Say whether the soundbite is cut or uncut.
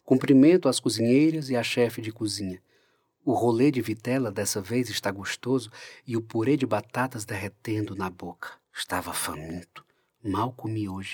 cut